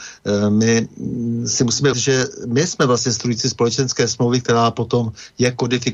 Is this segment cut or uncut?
cut